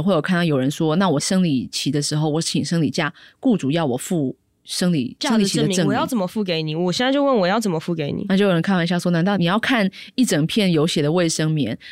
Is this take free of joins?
yes; 0 cuts

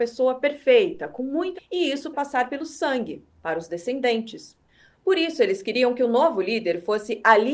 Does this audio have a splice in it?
yes; 2 cuts; at 1.5 s, 2.1 s

